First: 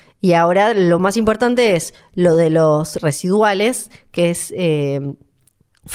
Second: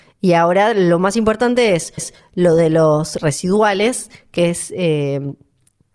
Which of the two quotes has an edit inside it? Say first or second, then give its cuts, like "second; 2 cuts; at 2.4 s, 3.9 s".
second; 1 cut; at 2.0 s